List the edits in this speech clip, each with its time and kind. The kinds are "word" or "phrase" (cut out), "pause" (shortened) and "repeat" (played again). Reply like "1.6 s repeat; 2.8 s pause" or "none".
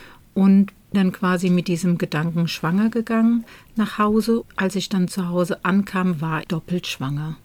0.9 s word; 4.4 s word; 6.4 s word